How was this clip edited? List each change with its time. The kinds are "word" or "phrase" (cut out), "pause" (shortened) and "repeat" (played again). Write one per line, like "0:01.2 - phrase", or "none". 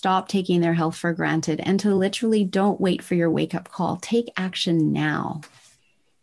none